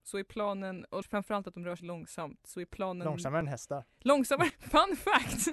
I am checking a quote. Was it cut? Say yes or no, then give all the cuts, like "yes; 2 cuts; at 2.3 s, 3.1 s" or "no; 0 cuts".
yes; 3 cuts; at 1.0 s, 1.8 s, 4.5 s